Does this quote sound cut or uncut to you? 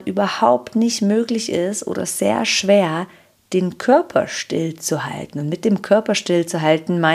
uncut